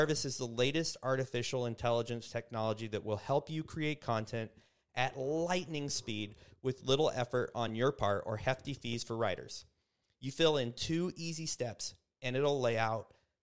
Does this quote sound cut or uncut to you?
uncut